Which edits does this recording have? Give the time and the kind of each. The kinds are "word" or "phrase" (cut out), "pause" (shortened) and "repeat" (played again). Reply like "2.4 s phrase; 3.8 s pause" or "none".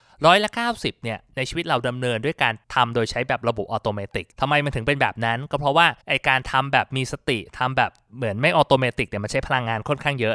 2.6 s pause; 4.3 s pause; 6.0 s pause